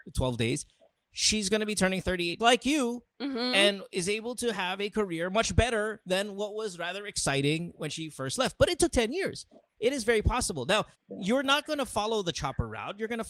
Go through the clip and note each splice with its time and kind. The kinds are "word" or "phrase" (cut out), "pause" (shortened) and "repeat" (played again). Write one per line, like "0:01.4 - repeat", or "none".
0:02.4 - word
0:03.1 - pause
0:10.9 - pause

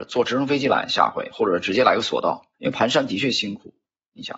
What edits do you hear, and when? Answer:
0:02.5 - pause

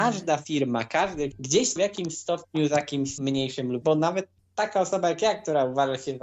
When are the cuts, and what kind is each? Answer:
0:01.3 - word
0:01.8 - word
0:03.2 - word
0:03.8 - word

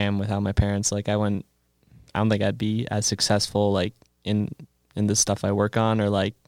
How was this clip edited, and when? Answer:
none

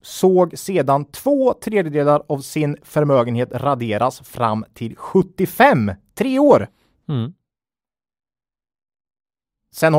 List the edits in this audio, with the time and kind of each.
none

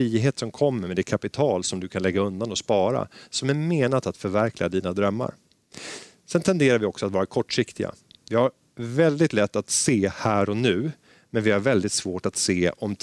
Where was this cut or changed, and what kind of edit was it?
none

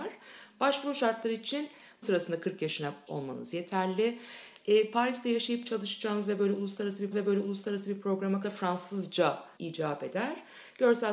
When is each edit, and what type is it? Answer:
0:02.0 - word
0:03.1 - word
0:07.1 - repeat
0:08.4 - phrase
0:09.6 - word

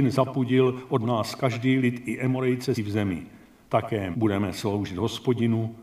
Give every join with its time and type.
0:02.8 - word
0:04.1 - word

